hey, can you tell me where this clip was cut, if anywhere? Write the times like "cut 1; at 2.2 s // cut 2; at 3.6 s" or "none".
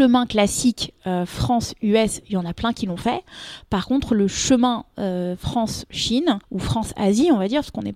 cut 1; at 6.4 s